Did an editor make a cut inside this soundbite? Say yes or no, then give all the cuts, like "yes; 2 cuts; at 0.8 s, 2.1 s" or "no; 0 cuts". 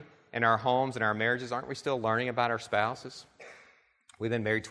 no; 0 cuts